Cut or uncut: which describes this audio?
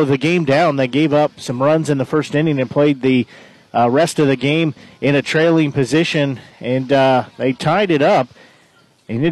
uncut